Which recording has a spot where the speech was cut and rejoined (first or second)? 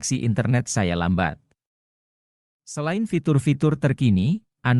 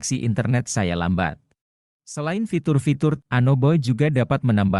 second